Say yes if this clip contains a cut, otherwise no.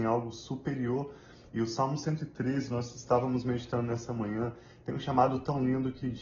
no